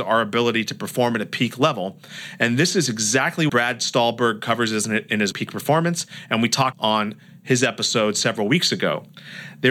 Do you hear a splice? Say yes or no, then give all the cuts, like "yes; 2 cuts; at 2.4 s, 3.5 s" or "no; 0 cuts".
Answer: yes; 3 cuts; at 3.5 s, 5.3 s, 6.7 s